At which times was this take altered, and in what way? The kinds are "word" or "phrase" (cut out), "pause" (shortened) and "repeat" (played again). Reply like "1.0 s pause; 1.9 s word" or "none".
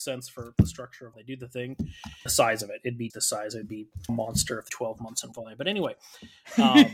1.1 s word; 2.3 s word; 3.1 s word; 4.1 s word; 4.7 s word; 5.3 s word